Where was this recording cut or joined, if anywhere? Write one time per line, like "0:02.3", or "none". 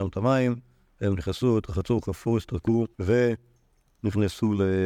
0:02.9